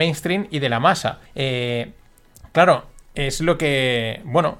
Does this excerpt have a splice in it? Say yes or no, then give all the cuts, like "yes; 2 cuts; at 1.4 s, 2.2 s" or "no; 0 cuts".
yes; 1 cut; at 1.3 s